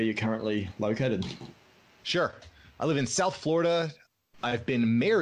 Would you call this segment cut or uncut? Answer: uncut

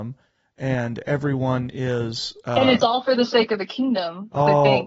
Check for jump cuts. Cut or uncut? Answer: uncut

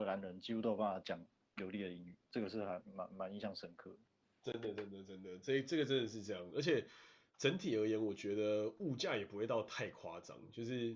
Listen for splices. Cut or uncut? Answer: uncut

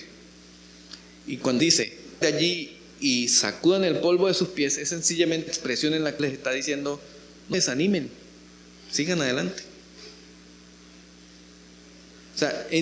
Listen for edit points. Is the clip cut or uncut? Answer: cut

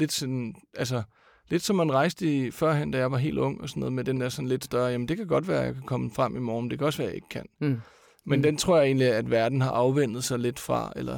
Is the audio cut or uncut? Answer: uncut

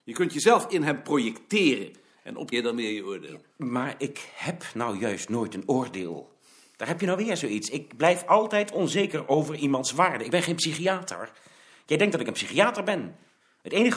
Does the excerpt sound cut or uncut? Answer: cut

